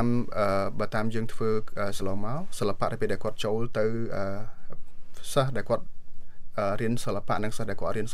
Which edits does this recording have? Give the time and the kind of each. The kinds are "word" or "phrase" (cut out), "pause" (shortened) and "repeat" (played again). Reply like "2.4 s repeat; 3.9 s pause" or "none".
2.0 s word